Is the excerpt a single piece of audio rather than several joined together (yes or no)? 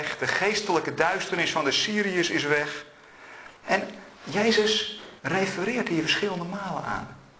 no